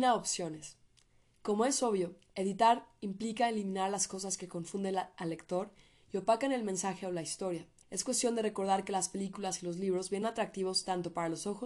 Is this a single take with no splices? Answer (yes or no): no